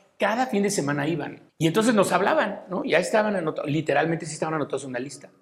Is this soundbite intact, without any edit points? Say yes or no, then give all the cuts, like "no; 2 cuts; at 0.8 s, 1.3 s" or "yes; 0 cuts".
no; 1 cut; at 1.5 s